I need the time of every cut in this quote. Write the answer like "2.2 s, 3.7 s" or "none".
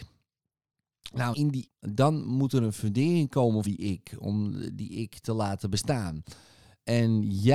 1.3 s, 1.7 s, 3.6 s